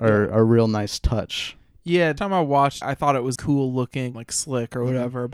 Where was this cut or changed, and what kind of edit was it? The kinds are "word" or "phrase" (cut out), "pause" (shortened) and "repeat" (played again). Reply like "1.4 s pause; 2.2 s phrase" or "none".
2.2 s word; 2.8 s word; 3.4 s word; 4.1 s word